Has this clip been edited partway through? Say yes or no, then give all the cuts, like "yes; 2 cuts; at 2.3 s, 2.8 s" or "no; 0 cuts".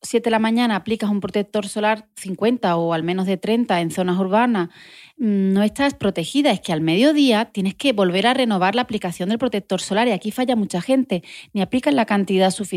no; 0 cuts